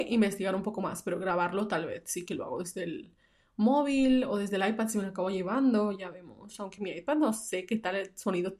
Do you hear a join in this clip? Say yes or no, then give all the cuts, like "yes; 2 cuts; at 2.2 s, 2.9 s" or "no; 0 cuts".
no; 0 cuts